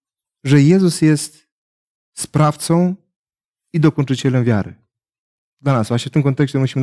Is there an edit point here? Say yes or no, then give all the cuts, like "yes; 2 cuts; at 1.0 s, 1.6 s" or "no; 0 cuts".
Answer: no; 0 cuts